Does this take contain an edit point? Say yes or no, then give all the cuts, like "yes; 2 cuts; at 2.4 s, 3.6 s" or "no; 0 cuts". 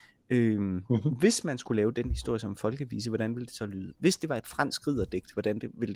no; 0 cuts